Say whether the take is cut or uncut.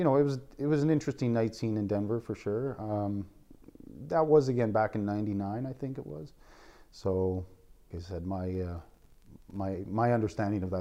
cut